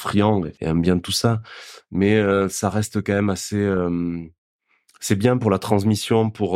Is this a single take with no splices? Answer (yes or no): yes